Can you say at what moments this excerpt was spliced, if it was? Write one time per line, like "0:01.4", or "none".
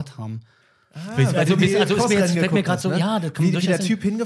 none